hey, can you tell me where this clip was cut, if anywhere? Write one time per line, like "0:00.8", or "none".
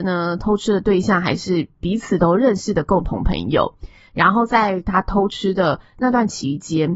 none